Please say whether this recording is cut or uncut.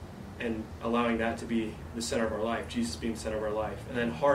uncut